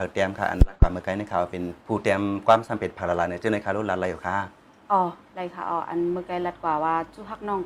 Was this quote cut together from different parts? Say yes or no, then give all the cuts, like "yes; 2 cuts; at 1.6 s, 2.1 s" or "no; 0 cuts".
yes; 1 cut; at 1.8 s